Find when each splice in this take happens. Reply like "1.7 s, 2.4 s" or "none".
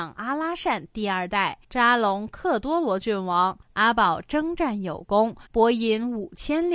1.6 s, 3.6 s, 5.5 s